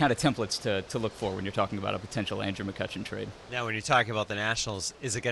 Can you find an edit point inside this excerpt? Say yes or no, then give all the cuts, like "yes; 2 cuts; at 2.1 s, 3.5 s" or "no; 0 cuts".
no; 0 cuts